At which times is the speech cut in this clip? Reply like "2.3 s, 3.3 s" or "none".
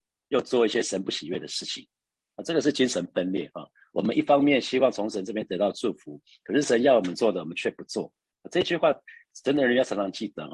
none